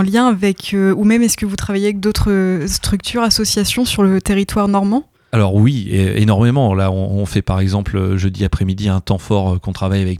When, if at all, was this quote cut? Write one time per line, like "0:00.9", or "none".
none

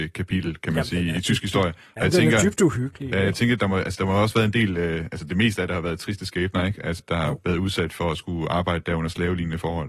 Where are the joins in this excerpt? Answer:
0:07.0

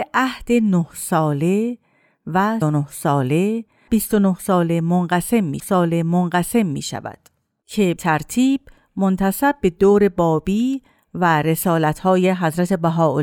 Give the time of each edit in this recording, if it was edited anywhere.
0:02.6
0:03.9
0:05.6
0:08.0

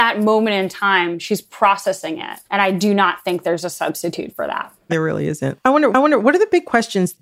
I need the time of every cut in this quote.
0:02.4
0:04.9
0:05.9

